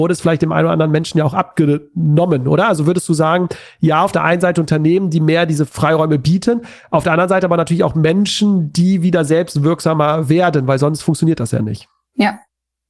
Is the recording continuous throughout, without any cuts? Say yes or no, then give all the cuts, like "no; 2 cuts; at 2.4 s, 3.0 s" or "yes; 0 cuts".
yes; 0 cuts